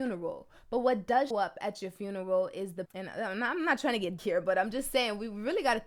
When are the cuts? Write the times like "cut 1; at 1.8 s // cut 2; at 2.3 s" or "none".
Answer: cut 1; at 1.3 s // cut 2; at 2.9 s // cut 3; at 4.2 s